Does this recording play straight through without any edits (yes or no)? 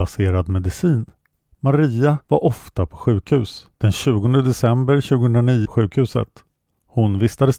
no